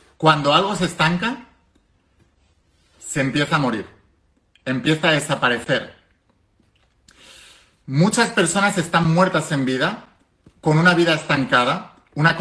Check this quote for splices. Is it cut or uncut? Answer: uncut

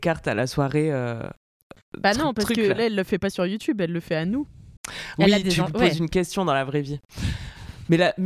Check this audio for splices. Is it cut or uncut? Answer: cut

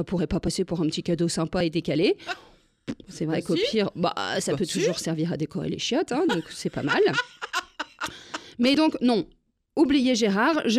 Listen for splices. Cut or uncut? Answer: uncut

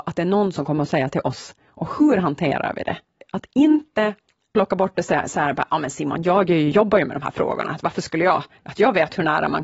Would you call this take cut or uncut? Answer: uncut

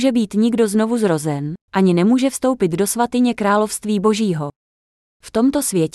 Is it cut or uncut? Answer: cut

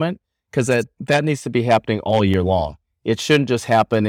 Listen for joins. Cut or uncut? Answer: uncut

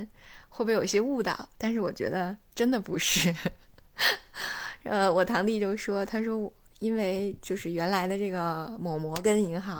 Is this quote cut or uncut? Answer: uncut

